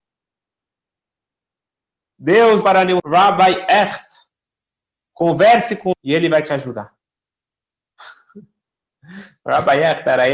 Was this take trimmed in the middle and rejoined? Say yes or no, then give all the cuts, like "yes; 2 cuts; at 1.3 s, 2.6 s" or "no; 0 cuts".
yes; 3 cuts; at 2.6 s, 3.0 s, 5.9 s